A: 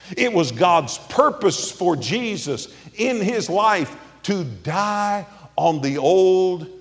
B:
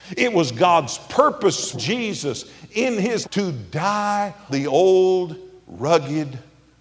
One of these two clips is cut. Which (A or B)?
B